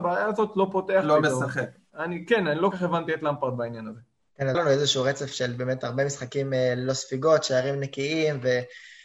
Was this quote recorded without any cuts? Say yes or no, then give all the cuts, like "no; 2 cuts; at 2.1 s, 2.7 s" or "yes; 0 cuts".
no; 2 cuts; at 2.7 s, 4.5 s